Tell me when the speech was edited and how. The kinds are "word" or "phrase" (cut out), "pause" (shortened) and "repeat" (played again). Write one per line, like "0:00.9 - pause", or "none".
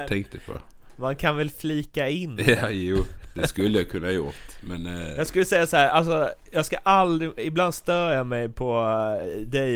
0:06.4 - pause